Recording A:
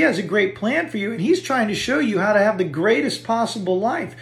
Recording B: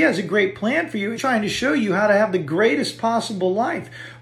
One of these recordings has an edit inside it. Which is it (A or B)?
B